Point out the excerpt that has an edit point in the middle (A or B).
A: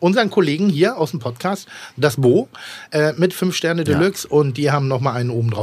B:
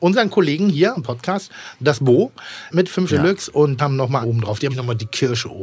B